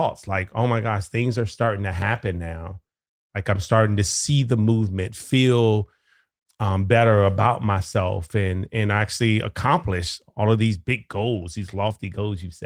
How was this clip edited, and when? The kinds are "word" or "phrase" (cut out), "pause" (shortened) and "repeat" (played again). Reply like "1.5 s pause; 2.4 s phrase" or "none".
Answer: none